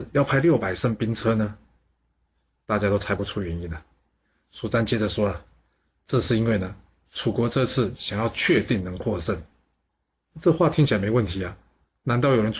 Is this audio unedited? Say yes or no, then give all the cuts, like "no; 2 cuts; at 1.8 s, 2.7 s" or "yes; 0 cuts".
yes; 0 cuts